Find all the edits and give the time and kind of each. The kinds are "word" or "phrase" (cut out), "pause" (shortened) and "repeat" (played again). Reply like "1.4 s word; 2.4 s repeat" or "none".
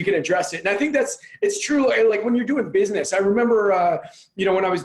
none